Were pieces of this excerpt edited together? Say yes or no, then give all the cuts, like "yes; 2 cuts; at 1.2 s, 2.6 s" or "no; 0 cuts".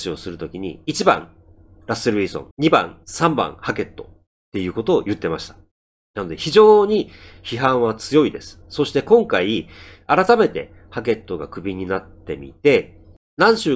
yes; 2 cuts; at 2.5 s, 3.0 s